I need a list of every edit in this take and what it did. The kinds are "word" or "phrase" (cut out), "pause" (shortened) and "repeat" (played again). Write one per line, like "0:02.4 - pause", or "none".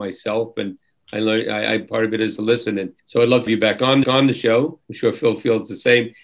0:02.4 - word
0:03.0 - pause
0:03.5 - phrase
0:04.0 - repeat
0:04.8 - pause